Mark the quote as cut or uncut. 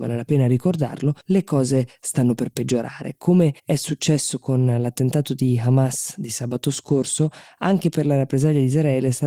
cut